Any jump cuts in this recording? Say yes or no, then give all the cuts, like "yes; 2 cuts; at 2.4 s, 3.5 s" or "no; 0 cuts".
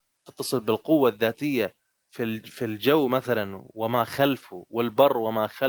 no; 0 cuts